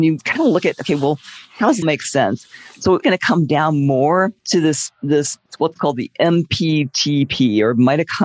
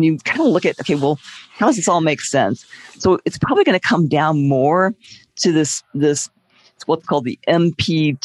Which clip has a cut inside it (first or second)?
first